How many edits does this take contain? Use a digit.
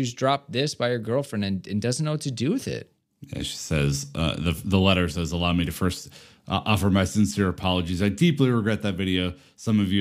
0